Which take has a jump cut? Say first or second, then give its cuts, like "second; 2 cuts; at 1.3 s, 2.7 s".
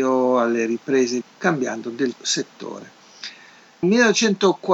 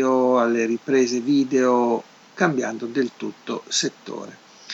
first; 3 cuts; at 1.2 s, 2.2 s, 3.8 s